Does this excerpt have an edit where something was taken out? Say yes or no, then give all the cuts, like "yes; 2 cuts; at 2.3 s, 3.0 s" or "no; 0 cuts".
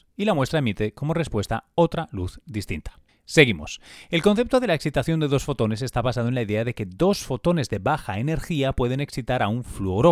no; 0 cuts